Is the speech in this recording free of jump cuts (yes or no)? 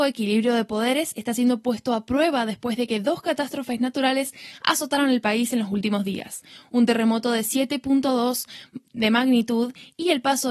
yes